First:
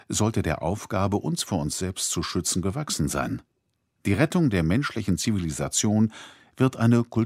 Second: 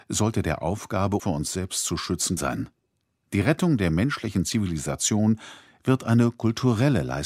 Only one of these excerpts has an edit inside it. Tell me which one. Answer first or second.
second